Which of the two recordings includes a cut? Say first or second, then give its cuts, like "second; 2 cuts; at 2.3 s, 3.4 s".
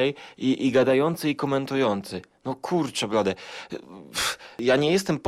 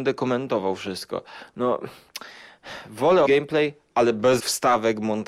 second; 2 cuts; at 3.2 s, 4.4 s